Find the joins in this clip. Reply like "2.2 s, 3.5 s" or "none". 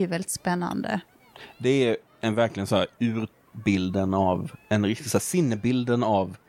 2.1 s